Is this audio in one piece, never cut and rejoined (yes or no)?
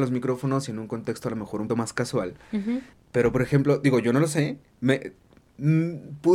no